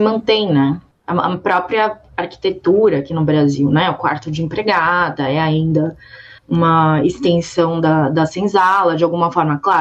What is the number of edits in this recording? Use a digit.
2